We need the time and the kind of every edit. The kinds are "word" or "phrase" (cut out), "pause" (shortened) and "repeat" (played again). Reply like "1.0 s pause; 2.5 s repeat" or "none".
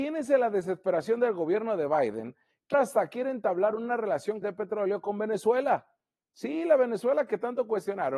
2.7 s word; 4.4 s word